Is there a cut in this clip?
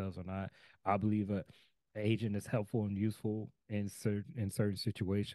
no; 0 cuts

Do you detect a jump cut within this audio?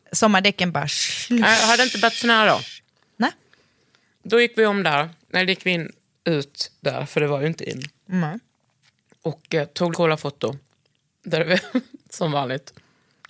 yes; 1 cut; at 9.9 s

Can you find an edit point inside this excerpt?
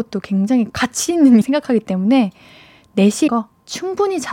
yes; 2 cuts; at 1.4 s, 3.3 s

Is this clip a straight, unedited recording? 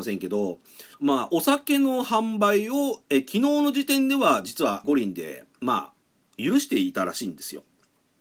no; 2 cuts; at 0.9 s, 4.8 s

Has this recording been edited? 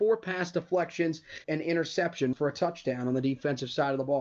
yes; 2 cuts; at 1.4 s, 2.3 s

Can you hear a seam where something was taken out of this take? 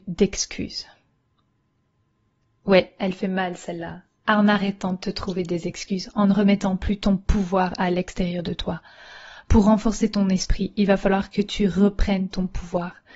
no; 0 cuts

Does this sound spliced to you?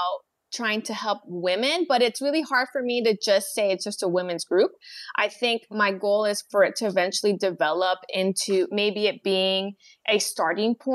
no; 0 cuts

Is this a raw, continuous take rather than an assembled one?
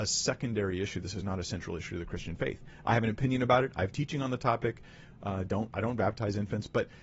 yes; 0 cuts

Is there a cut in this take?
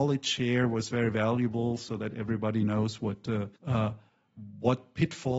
yes; 1 cut; at 3.6 s

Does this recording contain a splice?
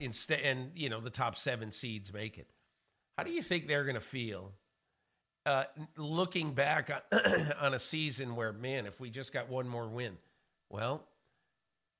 no; 0 cuts

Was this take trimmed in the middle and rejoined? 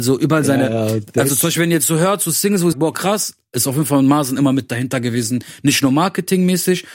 yes; 1 cut; at 2.7 s

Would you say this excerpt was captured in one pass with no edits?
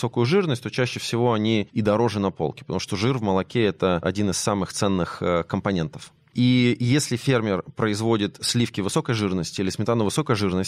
yes; 0 cuts

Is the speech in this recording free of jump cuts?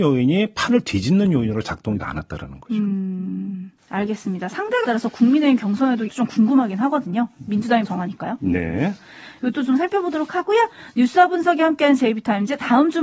no; 5 cuts; at 2.0 s, 3.8 s, 4.8 s, 6.1 s, 7.8 s

